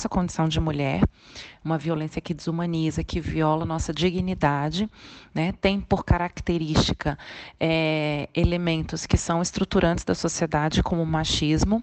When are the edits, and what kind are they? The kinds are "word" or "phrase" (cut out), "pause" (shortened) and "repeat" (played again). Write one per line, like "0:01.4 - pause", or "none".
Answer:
none